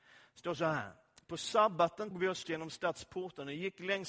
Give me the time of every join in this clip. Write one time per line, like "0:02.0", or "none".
0:02.1
0:02.4